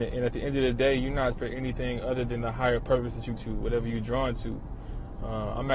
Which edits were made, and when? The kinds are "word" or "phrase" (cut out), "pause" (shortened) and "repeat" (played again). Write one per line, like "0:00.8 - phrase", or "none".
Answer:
0:01.3 - word
0:03.4 - word